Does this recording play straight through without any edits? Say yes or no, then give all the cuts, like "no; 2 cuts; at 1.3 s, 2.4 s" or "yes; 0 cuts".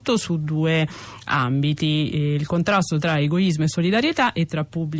yes; 0 cuts